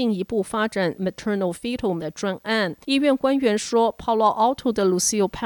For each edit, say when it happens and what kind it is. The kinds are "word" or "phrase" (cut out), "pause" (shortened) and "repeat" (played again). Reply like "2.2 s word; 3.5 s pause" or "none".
0.9 s word; 2.0 s word; 2.8 s pause